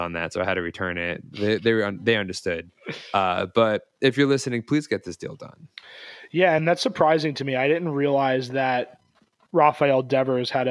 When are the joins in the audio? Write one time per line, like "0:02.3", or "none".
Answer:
none